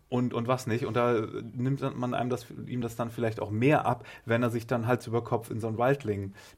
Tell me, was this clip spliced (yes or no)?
no